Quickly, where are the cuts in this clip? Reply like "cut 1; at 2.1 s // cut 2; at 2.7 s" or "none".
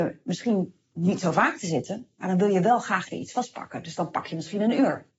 cut 1; at 3.1 s